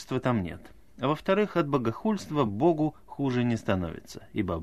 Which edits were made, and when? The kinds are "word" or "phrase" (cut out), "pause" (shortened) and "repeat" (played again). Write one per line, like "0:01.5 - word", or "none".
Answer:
none